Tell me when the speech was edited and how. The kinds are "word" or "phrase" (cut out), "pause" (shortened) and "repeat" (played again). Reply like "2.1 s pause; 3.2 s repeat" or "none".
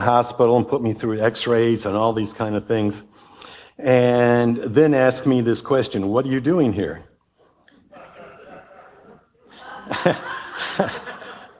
none